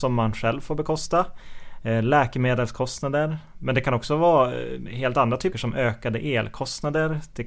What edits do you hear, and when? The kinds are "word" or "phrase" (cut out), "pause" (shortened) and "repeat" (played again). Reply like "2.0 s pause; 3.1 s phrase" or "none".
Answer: 5.5 s phrase